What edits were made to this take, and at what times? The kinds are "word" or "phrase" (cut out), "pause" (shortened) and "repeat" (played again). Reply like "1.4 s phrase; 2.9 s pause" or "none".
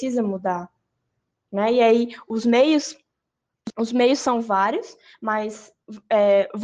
none